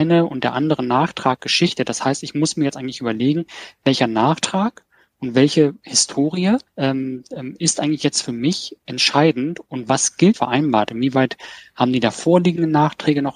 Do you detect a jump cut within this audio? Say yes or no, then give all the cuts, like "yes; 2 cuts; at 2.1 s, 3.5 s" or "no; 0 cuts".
yes; 2 cuts; at 6.7 s, 10.3 s